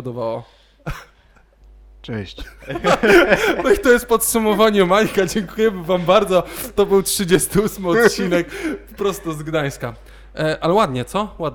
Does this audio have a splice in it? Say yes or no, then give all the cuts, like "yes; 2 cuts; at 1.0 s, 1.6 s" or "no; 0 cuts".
no; 0 cuts